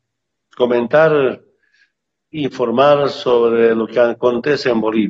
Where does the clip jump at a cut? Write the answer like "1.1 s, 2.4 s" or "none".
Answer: none